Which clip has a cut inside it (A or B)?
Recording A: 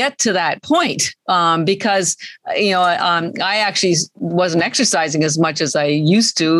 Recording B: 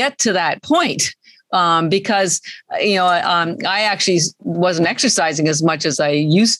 A